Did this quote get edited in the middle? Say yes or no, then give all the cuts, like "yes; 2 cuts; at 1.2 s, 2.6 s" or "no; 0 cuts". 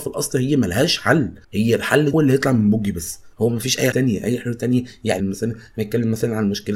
yes; 5 cuts; at 1.4 s, 2.1 s, 3.3 s, 3.9 s, 5.2 s